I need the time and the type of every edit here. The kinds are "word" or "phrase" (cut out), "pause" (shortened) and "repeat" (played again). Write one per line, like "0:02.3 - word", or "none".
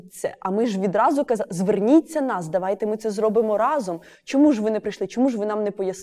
none